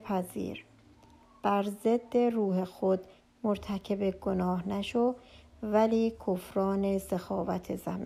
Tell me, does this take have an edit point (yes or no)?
no